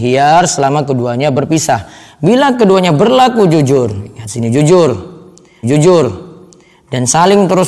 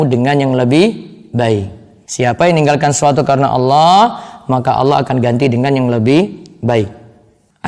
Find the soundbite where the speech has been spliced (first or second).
first